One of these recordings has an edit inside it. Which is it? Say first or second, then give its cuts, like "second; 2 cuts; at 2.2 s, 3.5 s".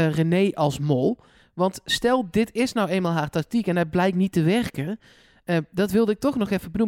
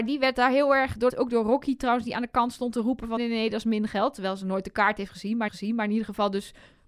second; 3 cuts; at 1.1 s, 3.2 s, 5.5 s